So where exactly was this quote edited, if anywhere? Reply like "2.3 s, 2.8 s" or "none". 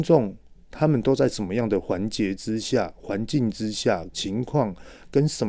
4.1 s